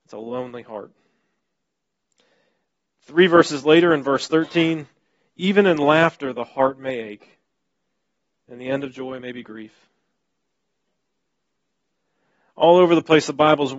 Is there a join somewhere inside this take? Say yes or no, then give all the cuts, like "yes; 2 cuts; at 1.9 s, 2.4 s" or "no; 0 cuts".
no; 0 cuts